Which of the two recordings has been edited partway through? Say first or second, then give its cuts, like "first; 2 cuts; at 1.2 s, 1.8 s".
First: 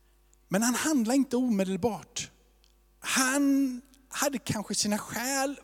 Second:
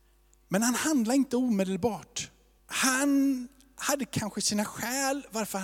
second; 1 cut; at 2.6 s